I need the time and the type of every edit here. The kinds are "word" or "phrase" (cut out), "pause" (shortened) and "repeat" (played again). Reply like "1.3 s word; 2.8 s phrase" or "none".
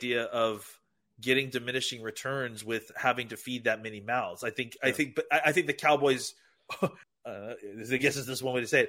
7.0 s pause